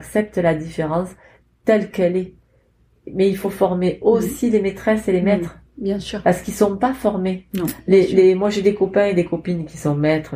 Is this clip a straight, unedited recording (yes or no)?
yes